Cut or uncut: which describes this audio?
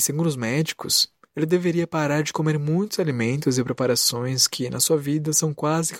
uncut